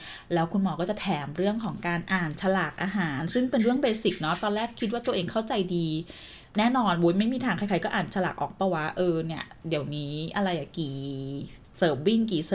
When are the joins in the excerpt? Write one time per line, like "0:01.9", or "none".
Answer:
0:06.5